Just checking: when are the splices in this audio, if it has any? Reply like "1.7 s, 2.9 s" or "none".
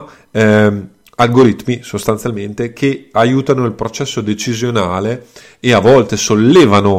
none